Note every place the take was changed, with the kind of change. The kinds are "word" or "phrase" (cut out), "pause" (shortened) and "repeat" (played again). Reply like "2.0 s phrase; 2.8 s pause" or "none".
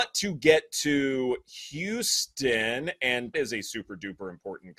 3.3 s phrase